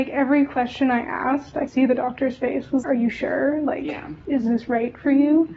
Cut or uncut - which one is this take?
cut